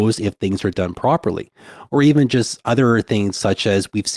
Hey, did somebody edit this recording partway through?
no; 0 cuts

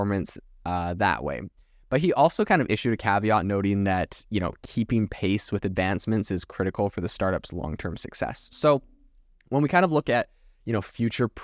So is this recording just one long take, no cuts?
yes; 0 cuts

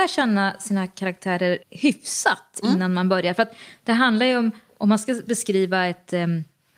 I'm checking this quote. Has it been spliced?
yes; 1 cut; at 1.6 s

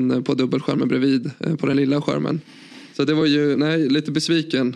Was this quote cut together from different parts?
no; 0 cuts

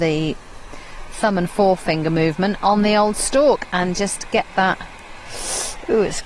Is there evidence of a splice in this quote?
no; 0 cuts

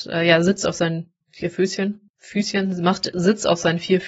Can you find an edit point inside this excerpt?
yes; 2 cuts; at 1.2 s, 2.1 s

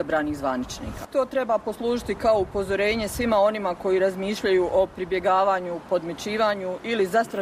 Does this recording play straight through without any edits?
yes; 0 cuts

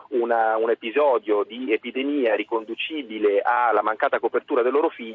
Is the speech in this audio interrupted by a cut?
no; 0 cuts

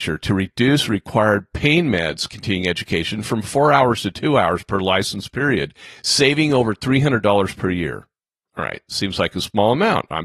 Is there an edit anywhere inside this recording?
no; 0 cuts

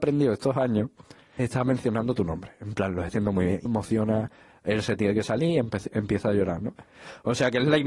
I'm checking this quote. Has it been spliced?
yes; 3 cuts; at 1.4 s, 3.1 s, 3.7 s

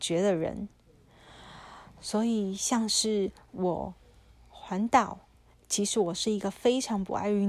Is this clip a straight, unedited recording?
yes; 0 cuts

